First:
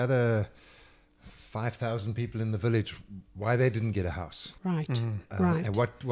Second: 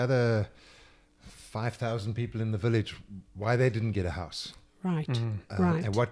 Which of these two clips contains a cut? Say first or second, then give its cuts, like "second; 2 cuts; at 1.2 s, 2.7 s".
first; 1 cut; at 4.6 s